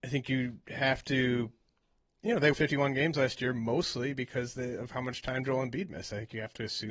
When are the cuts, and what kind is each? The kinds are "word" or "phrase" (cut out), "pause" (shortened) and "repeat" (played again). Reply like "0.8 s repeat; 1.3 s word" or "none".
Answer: 2.5 s word